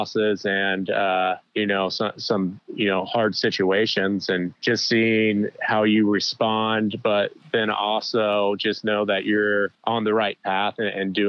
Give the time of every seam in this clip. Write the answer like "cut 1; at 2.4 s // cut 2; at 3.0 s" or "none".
cut 1; at 1.5 s // cut 2; at 4.6 s // cut 3; at 9.7 s